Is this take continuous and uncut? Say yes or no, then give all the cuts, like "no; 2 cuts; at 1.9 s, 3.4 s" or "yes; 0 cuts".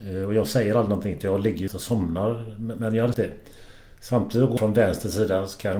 no; 4 cuts; at 1.7 s, 3.1 s, 4.0 s, 4.6 s